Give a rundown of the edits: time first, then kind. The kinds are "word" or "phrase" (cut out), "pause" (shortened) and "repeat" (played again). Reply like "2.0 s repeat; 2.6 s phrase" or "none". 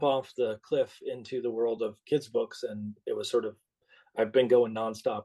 none